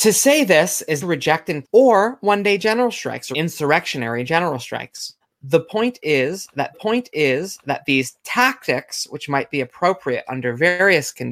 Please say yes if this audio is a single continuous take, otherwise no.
no